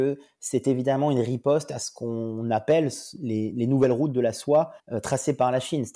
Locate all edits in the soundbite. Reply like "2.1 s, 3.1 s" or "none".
4.8 s